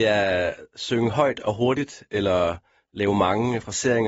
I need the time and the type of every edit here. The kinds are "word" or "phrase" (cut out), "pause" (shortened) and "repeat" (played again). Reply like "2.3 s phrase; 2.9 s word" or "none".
none